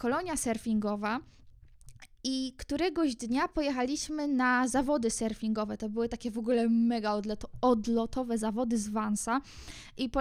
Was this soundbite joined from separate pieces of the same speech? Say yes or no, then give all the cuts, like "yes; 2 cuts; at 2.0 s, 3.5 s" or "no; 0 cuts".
no; 0 cuts